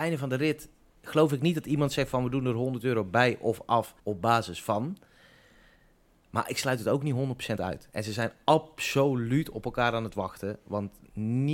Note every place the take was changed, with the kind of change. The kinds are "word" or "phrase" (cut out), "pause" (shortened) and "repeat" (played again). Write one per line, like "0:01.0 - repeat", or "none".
0:04.0 - pause